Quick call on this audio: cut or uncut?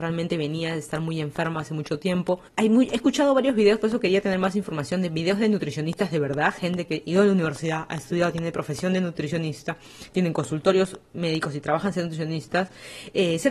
cut